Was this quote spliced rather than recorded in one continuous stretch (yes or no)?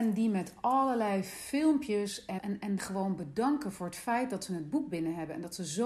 yes